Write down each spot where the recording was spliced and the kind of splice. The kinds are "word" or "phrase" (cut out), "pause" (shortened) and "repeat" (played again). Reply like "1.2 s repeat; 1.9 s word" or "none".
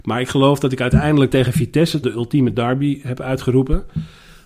1.3 s word; 2.0 s word